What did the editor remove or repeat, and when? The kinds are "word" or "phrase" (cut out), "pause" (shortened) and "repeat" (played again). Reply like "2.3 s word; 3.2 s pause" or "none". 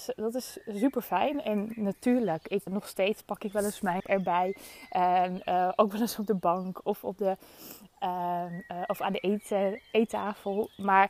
2.7 s word; 4.0 s phrase